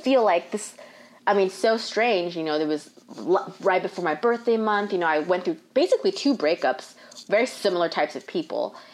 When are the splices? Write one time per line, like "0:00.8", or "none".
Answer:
none